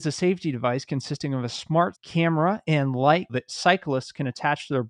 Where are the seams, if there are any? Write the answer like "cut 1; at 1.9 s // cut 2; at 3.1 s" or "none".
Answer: cut 1; at 1.9 s // cut 2; at 3.3 s